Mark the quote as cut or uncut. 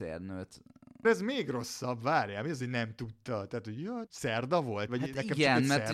cut